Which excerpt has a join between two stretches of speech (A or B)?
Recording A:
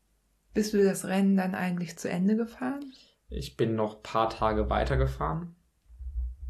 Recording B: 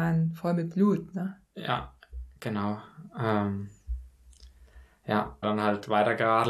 B